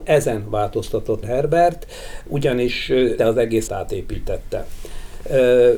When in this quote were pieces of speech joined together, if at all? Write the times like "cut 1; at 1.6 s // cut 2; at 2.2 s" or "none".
cut 1; at 1.2 s // cut 2; at 3.2 s // cut 3; at 3.7 s